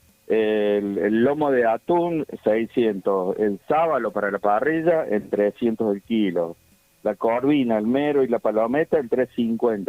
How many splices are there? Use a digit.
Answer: 0